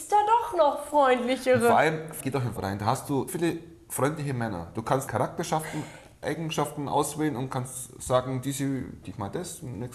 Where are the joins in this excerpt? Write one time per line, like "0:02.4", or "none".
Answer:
0:02.2
0:02.6
0:03.3
0:05.1
0:09.0